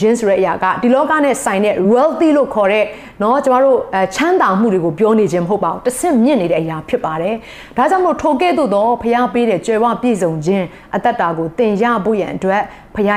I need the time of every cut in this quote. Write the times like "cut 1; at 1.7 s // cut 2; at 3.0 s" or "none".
cut 1; at 1.8 s